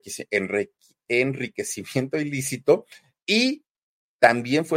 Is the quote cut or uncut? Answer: uncut